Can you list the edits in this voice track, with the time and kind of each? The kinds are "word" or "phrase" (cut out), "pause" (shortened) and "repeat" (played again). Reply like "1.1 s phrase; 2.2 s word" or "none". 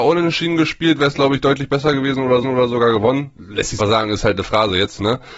2.4 s repeat; 3.8 s word